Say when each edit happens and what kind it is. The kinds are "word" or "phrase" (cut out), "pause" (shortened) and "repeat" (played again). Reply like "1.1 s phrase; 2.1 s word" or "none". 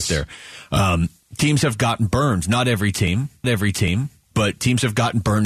3.4 s repeat